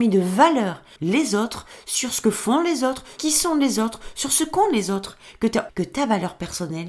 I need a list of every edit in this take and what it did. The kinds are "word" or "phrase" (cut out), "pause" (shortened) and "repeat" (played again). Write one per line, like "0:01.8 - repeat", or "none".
0:01.0 - word
0:03.2 - word
0:05.7 - word